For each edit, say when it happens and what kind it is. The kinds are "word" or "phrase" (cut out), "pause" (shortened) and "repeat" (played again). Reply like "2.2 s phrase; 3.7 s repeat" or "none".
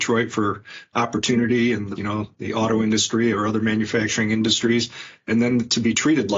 2.0 s word